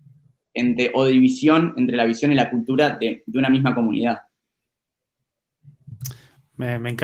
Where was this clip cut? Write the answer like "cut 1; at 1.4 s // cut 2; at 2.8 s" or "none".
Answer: none